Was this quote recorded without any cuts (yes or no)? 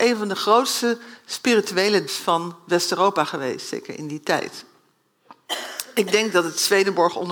no